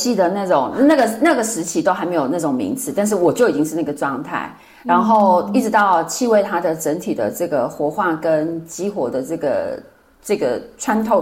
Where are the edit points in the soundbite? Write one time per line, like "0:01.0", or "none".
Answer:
none

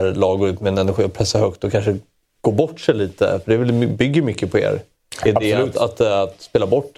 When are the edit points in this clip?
none

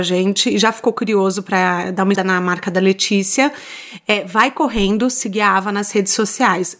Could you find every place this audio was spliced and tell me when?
0:02.1

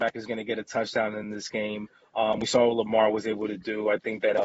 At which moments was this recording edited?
none

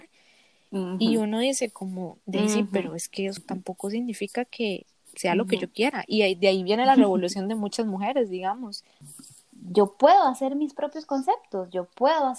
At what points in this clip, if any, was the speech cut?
0:03.4

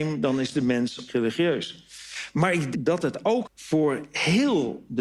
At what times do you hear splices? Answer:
0:01.1
0:02.7
0:03.4

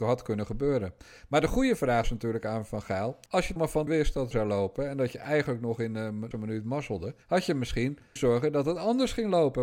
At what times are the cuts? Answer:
0:02.0
0:03.3
0:03.6
0:03.9
0:04.3
0:06.3
0:07.2
0:08.2

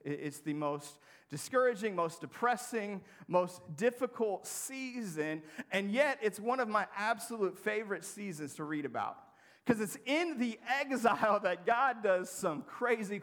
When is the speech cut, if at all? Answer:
none

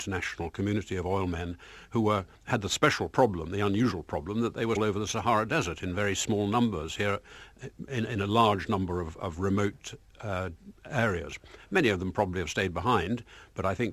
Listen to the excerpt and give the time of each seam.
0:02.3
0:04.8
0:07.9

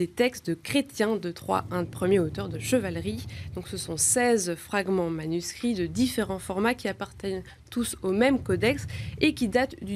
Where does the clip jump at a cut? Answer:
0:01.8
0:02.5

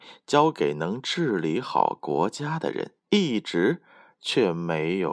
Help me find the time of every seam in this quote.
0:03.0

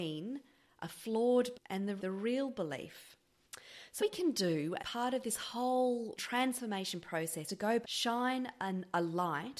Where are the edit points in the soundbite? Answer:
0:01.5
0:02.0
0:04.0
0:04.8
0:06.2
0:07.5
0:07.8

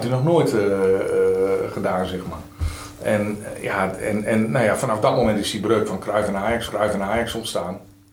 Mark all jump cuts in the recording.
0:06.7

